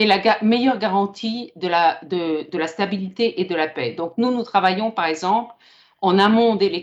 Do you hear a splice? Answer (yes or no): no